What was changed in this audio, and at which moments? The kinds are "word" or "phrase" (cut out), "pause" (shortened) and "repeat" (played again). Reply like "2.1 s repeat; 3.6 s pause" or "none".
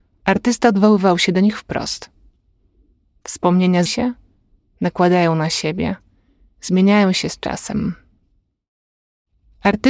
3.9 s word